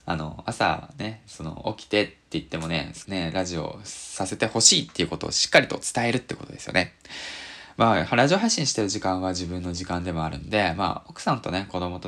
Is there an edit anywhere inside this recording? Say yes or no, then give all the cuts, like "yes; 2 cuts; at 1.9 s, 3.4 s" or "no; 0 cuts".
yes; 1 cut; at 3.0 s